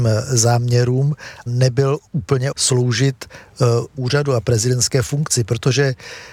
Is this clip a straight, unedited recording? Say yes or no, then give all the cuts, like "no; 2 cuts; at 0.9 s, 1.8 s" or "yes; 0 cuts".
no; 3 cuts; at 1.5 s, 2.5 s, 4.0 s